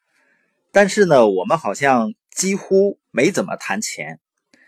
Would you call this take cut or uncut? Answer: cut